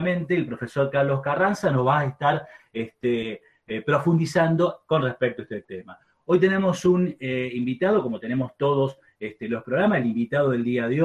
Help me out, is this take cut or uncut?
uncut